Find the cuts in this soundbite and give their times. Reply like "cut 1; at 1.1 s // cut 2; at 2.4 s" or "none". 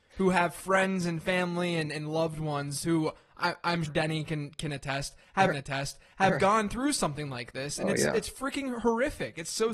cut 1; at 3.9 s // cut 2; at 5.5 s

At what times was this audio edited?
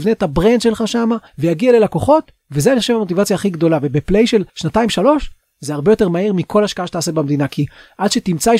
cut 1; at 1.3 s // cut 2; at 2.4 s // cut 3; at 4.5 s

